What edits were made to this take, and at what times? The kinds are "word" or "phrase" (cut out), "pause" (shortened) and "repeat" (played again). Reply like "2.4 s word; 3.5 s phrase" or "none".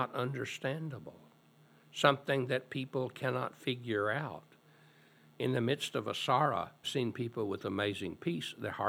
6.8 s word